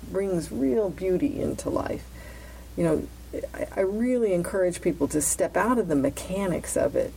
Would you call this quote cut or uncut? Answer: uncut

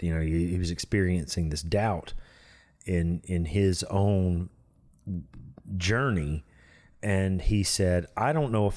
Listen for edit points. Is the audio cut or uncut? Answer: uncut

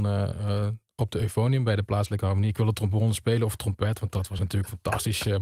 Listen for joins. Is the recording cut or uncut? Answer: uncut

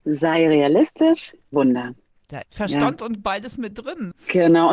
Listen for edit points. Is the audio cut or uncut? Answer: cut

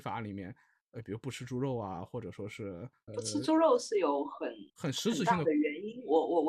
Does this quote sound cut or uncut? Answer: cut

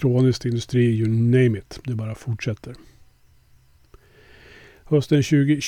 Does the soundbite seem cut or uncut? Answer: uncut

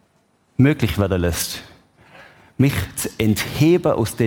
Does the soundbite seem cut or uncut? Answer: uncut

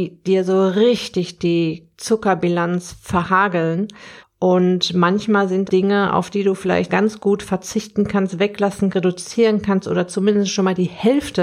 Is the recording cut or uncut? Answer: cut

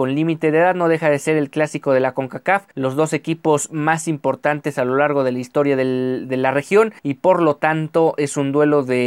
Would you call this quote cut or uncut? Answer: cut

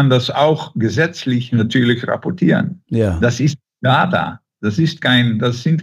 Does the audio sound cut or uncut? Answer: uncut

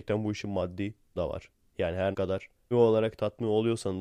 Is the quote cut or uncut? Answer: cut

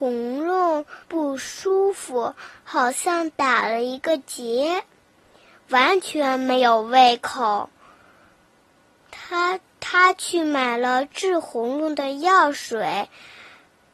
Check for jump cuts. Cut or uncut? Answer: cut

